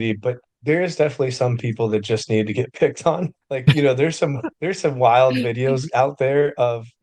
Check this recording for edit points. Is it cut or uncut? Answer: cut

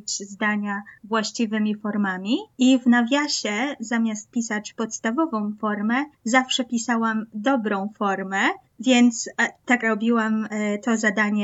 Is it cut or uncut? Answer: cut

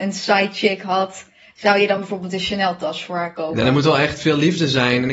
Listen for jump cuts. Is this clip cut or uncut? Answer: uncut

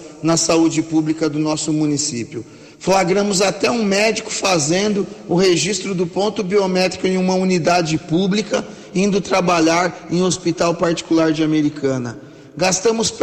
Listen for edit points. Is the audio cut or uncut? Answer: uncut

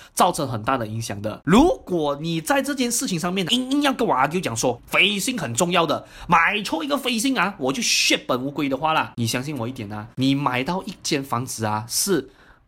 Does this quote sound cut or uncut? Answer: cut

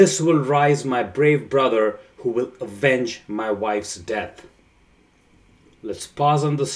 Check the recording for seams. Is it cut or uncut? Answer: uncut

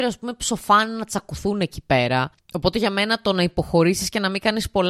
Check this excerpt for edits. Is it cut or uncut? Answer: uncut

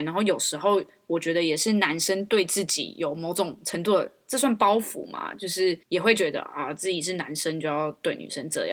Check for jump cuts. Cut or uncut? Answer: cut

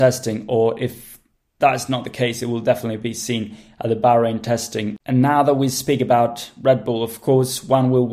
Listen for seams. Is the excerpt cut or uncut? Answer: cut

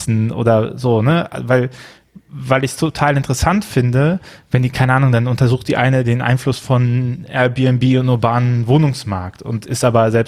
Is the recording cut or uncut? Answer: uncut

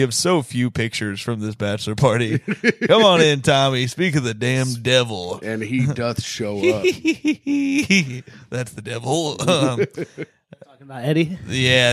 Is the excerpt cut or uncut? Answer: uncut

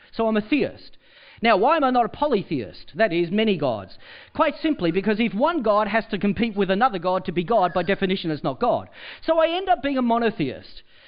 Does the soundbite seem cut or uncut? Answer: uncut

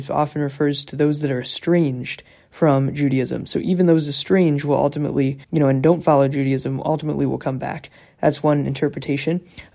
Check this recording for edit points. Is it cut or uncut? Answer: cut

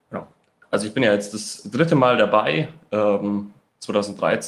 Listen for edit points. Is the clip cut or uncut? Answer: uncut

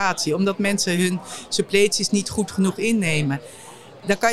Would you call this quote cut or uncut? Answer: uncut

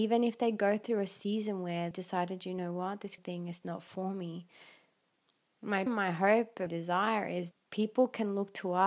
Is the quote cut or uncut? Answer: cut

